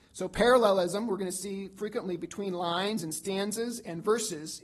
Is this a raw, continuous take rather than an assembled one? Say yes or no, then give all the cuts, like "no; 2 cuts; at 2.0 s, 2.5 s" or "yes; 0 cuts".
yes; 0 cuts